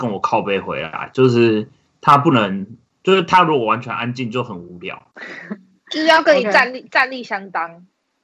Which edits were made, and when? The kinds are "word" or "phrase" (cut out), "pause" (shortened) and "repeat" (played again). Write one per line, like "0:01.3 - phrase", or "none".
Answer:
0:05.1 - pause